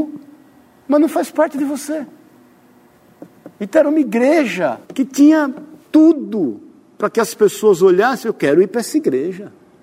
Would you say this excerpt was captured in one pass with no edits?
no; 3 cuts; at 3.5 s, 4.8 s, 5.8 s

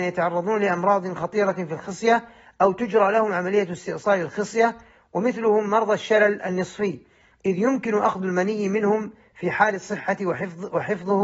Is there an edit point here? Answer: no; 0 cuts

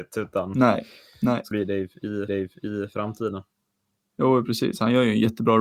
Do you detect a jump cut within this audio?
yes; 2 cuts; at 1.5 s, 2.3 s

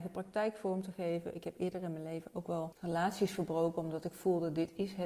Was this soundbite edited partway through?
no; 0 cuts

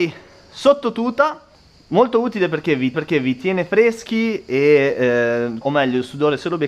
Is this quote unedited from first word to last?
no; 3 cuts; at 1.5 s, 2.9 s, 5.6 s

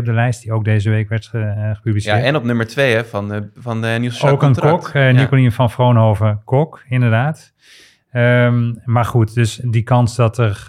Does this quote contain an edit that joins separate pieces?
no; 0 cuts

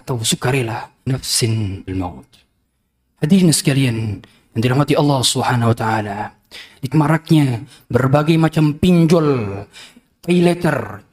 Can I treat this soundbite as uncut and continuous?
no; 3 cuts; at 1.1 s, 1.9 s, 6.9 s

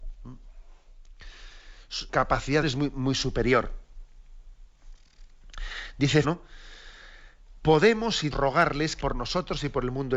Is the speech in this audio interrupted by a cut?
yes; 5 cuts; at 2.1 s, 2.6 s, 6.2 s, 8.3 s, 9.0 s

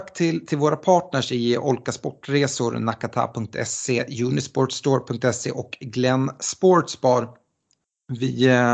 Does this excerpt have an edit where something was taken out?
no; 0 cuts

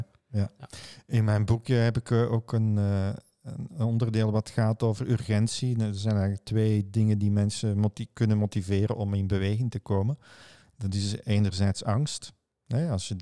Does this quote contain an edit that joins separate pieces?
no; 0 cuts

